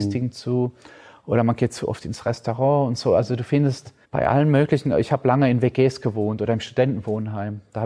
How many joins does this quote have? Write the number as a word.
one